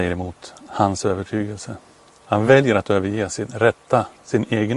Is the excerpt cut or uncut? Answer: uncut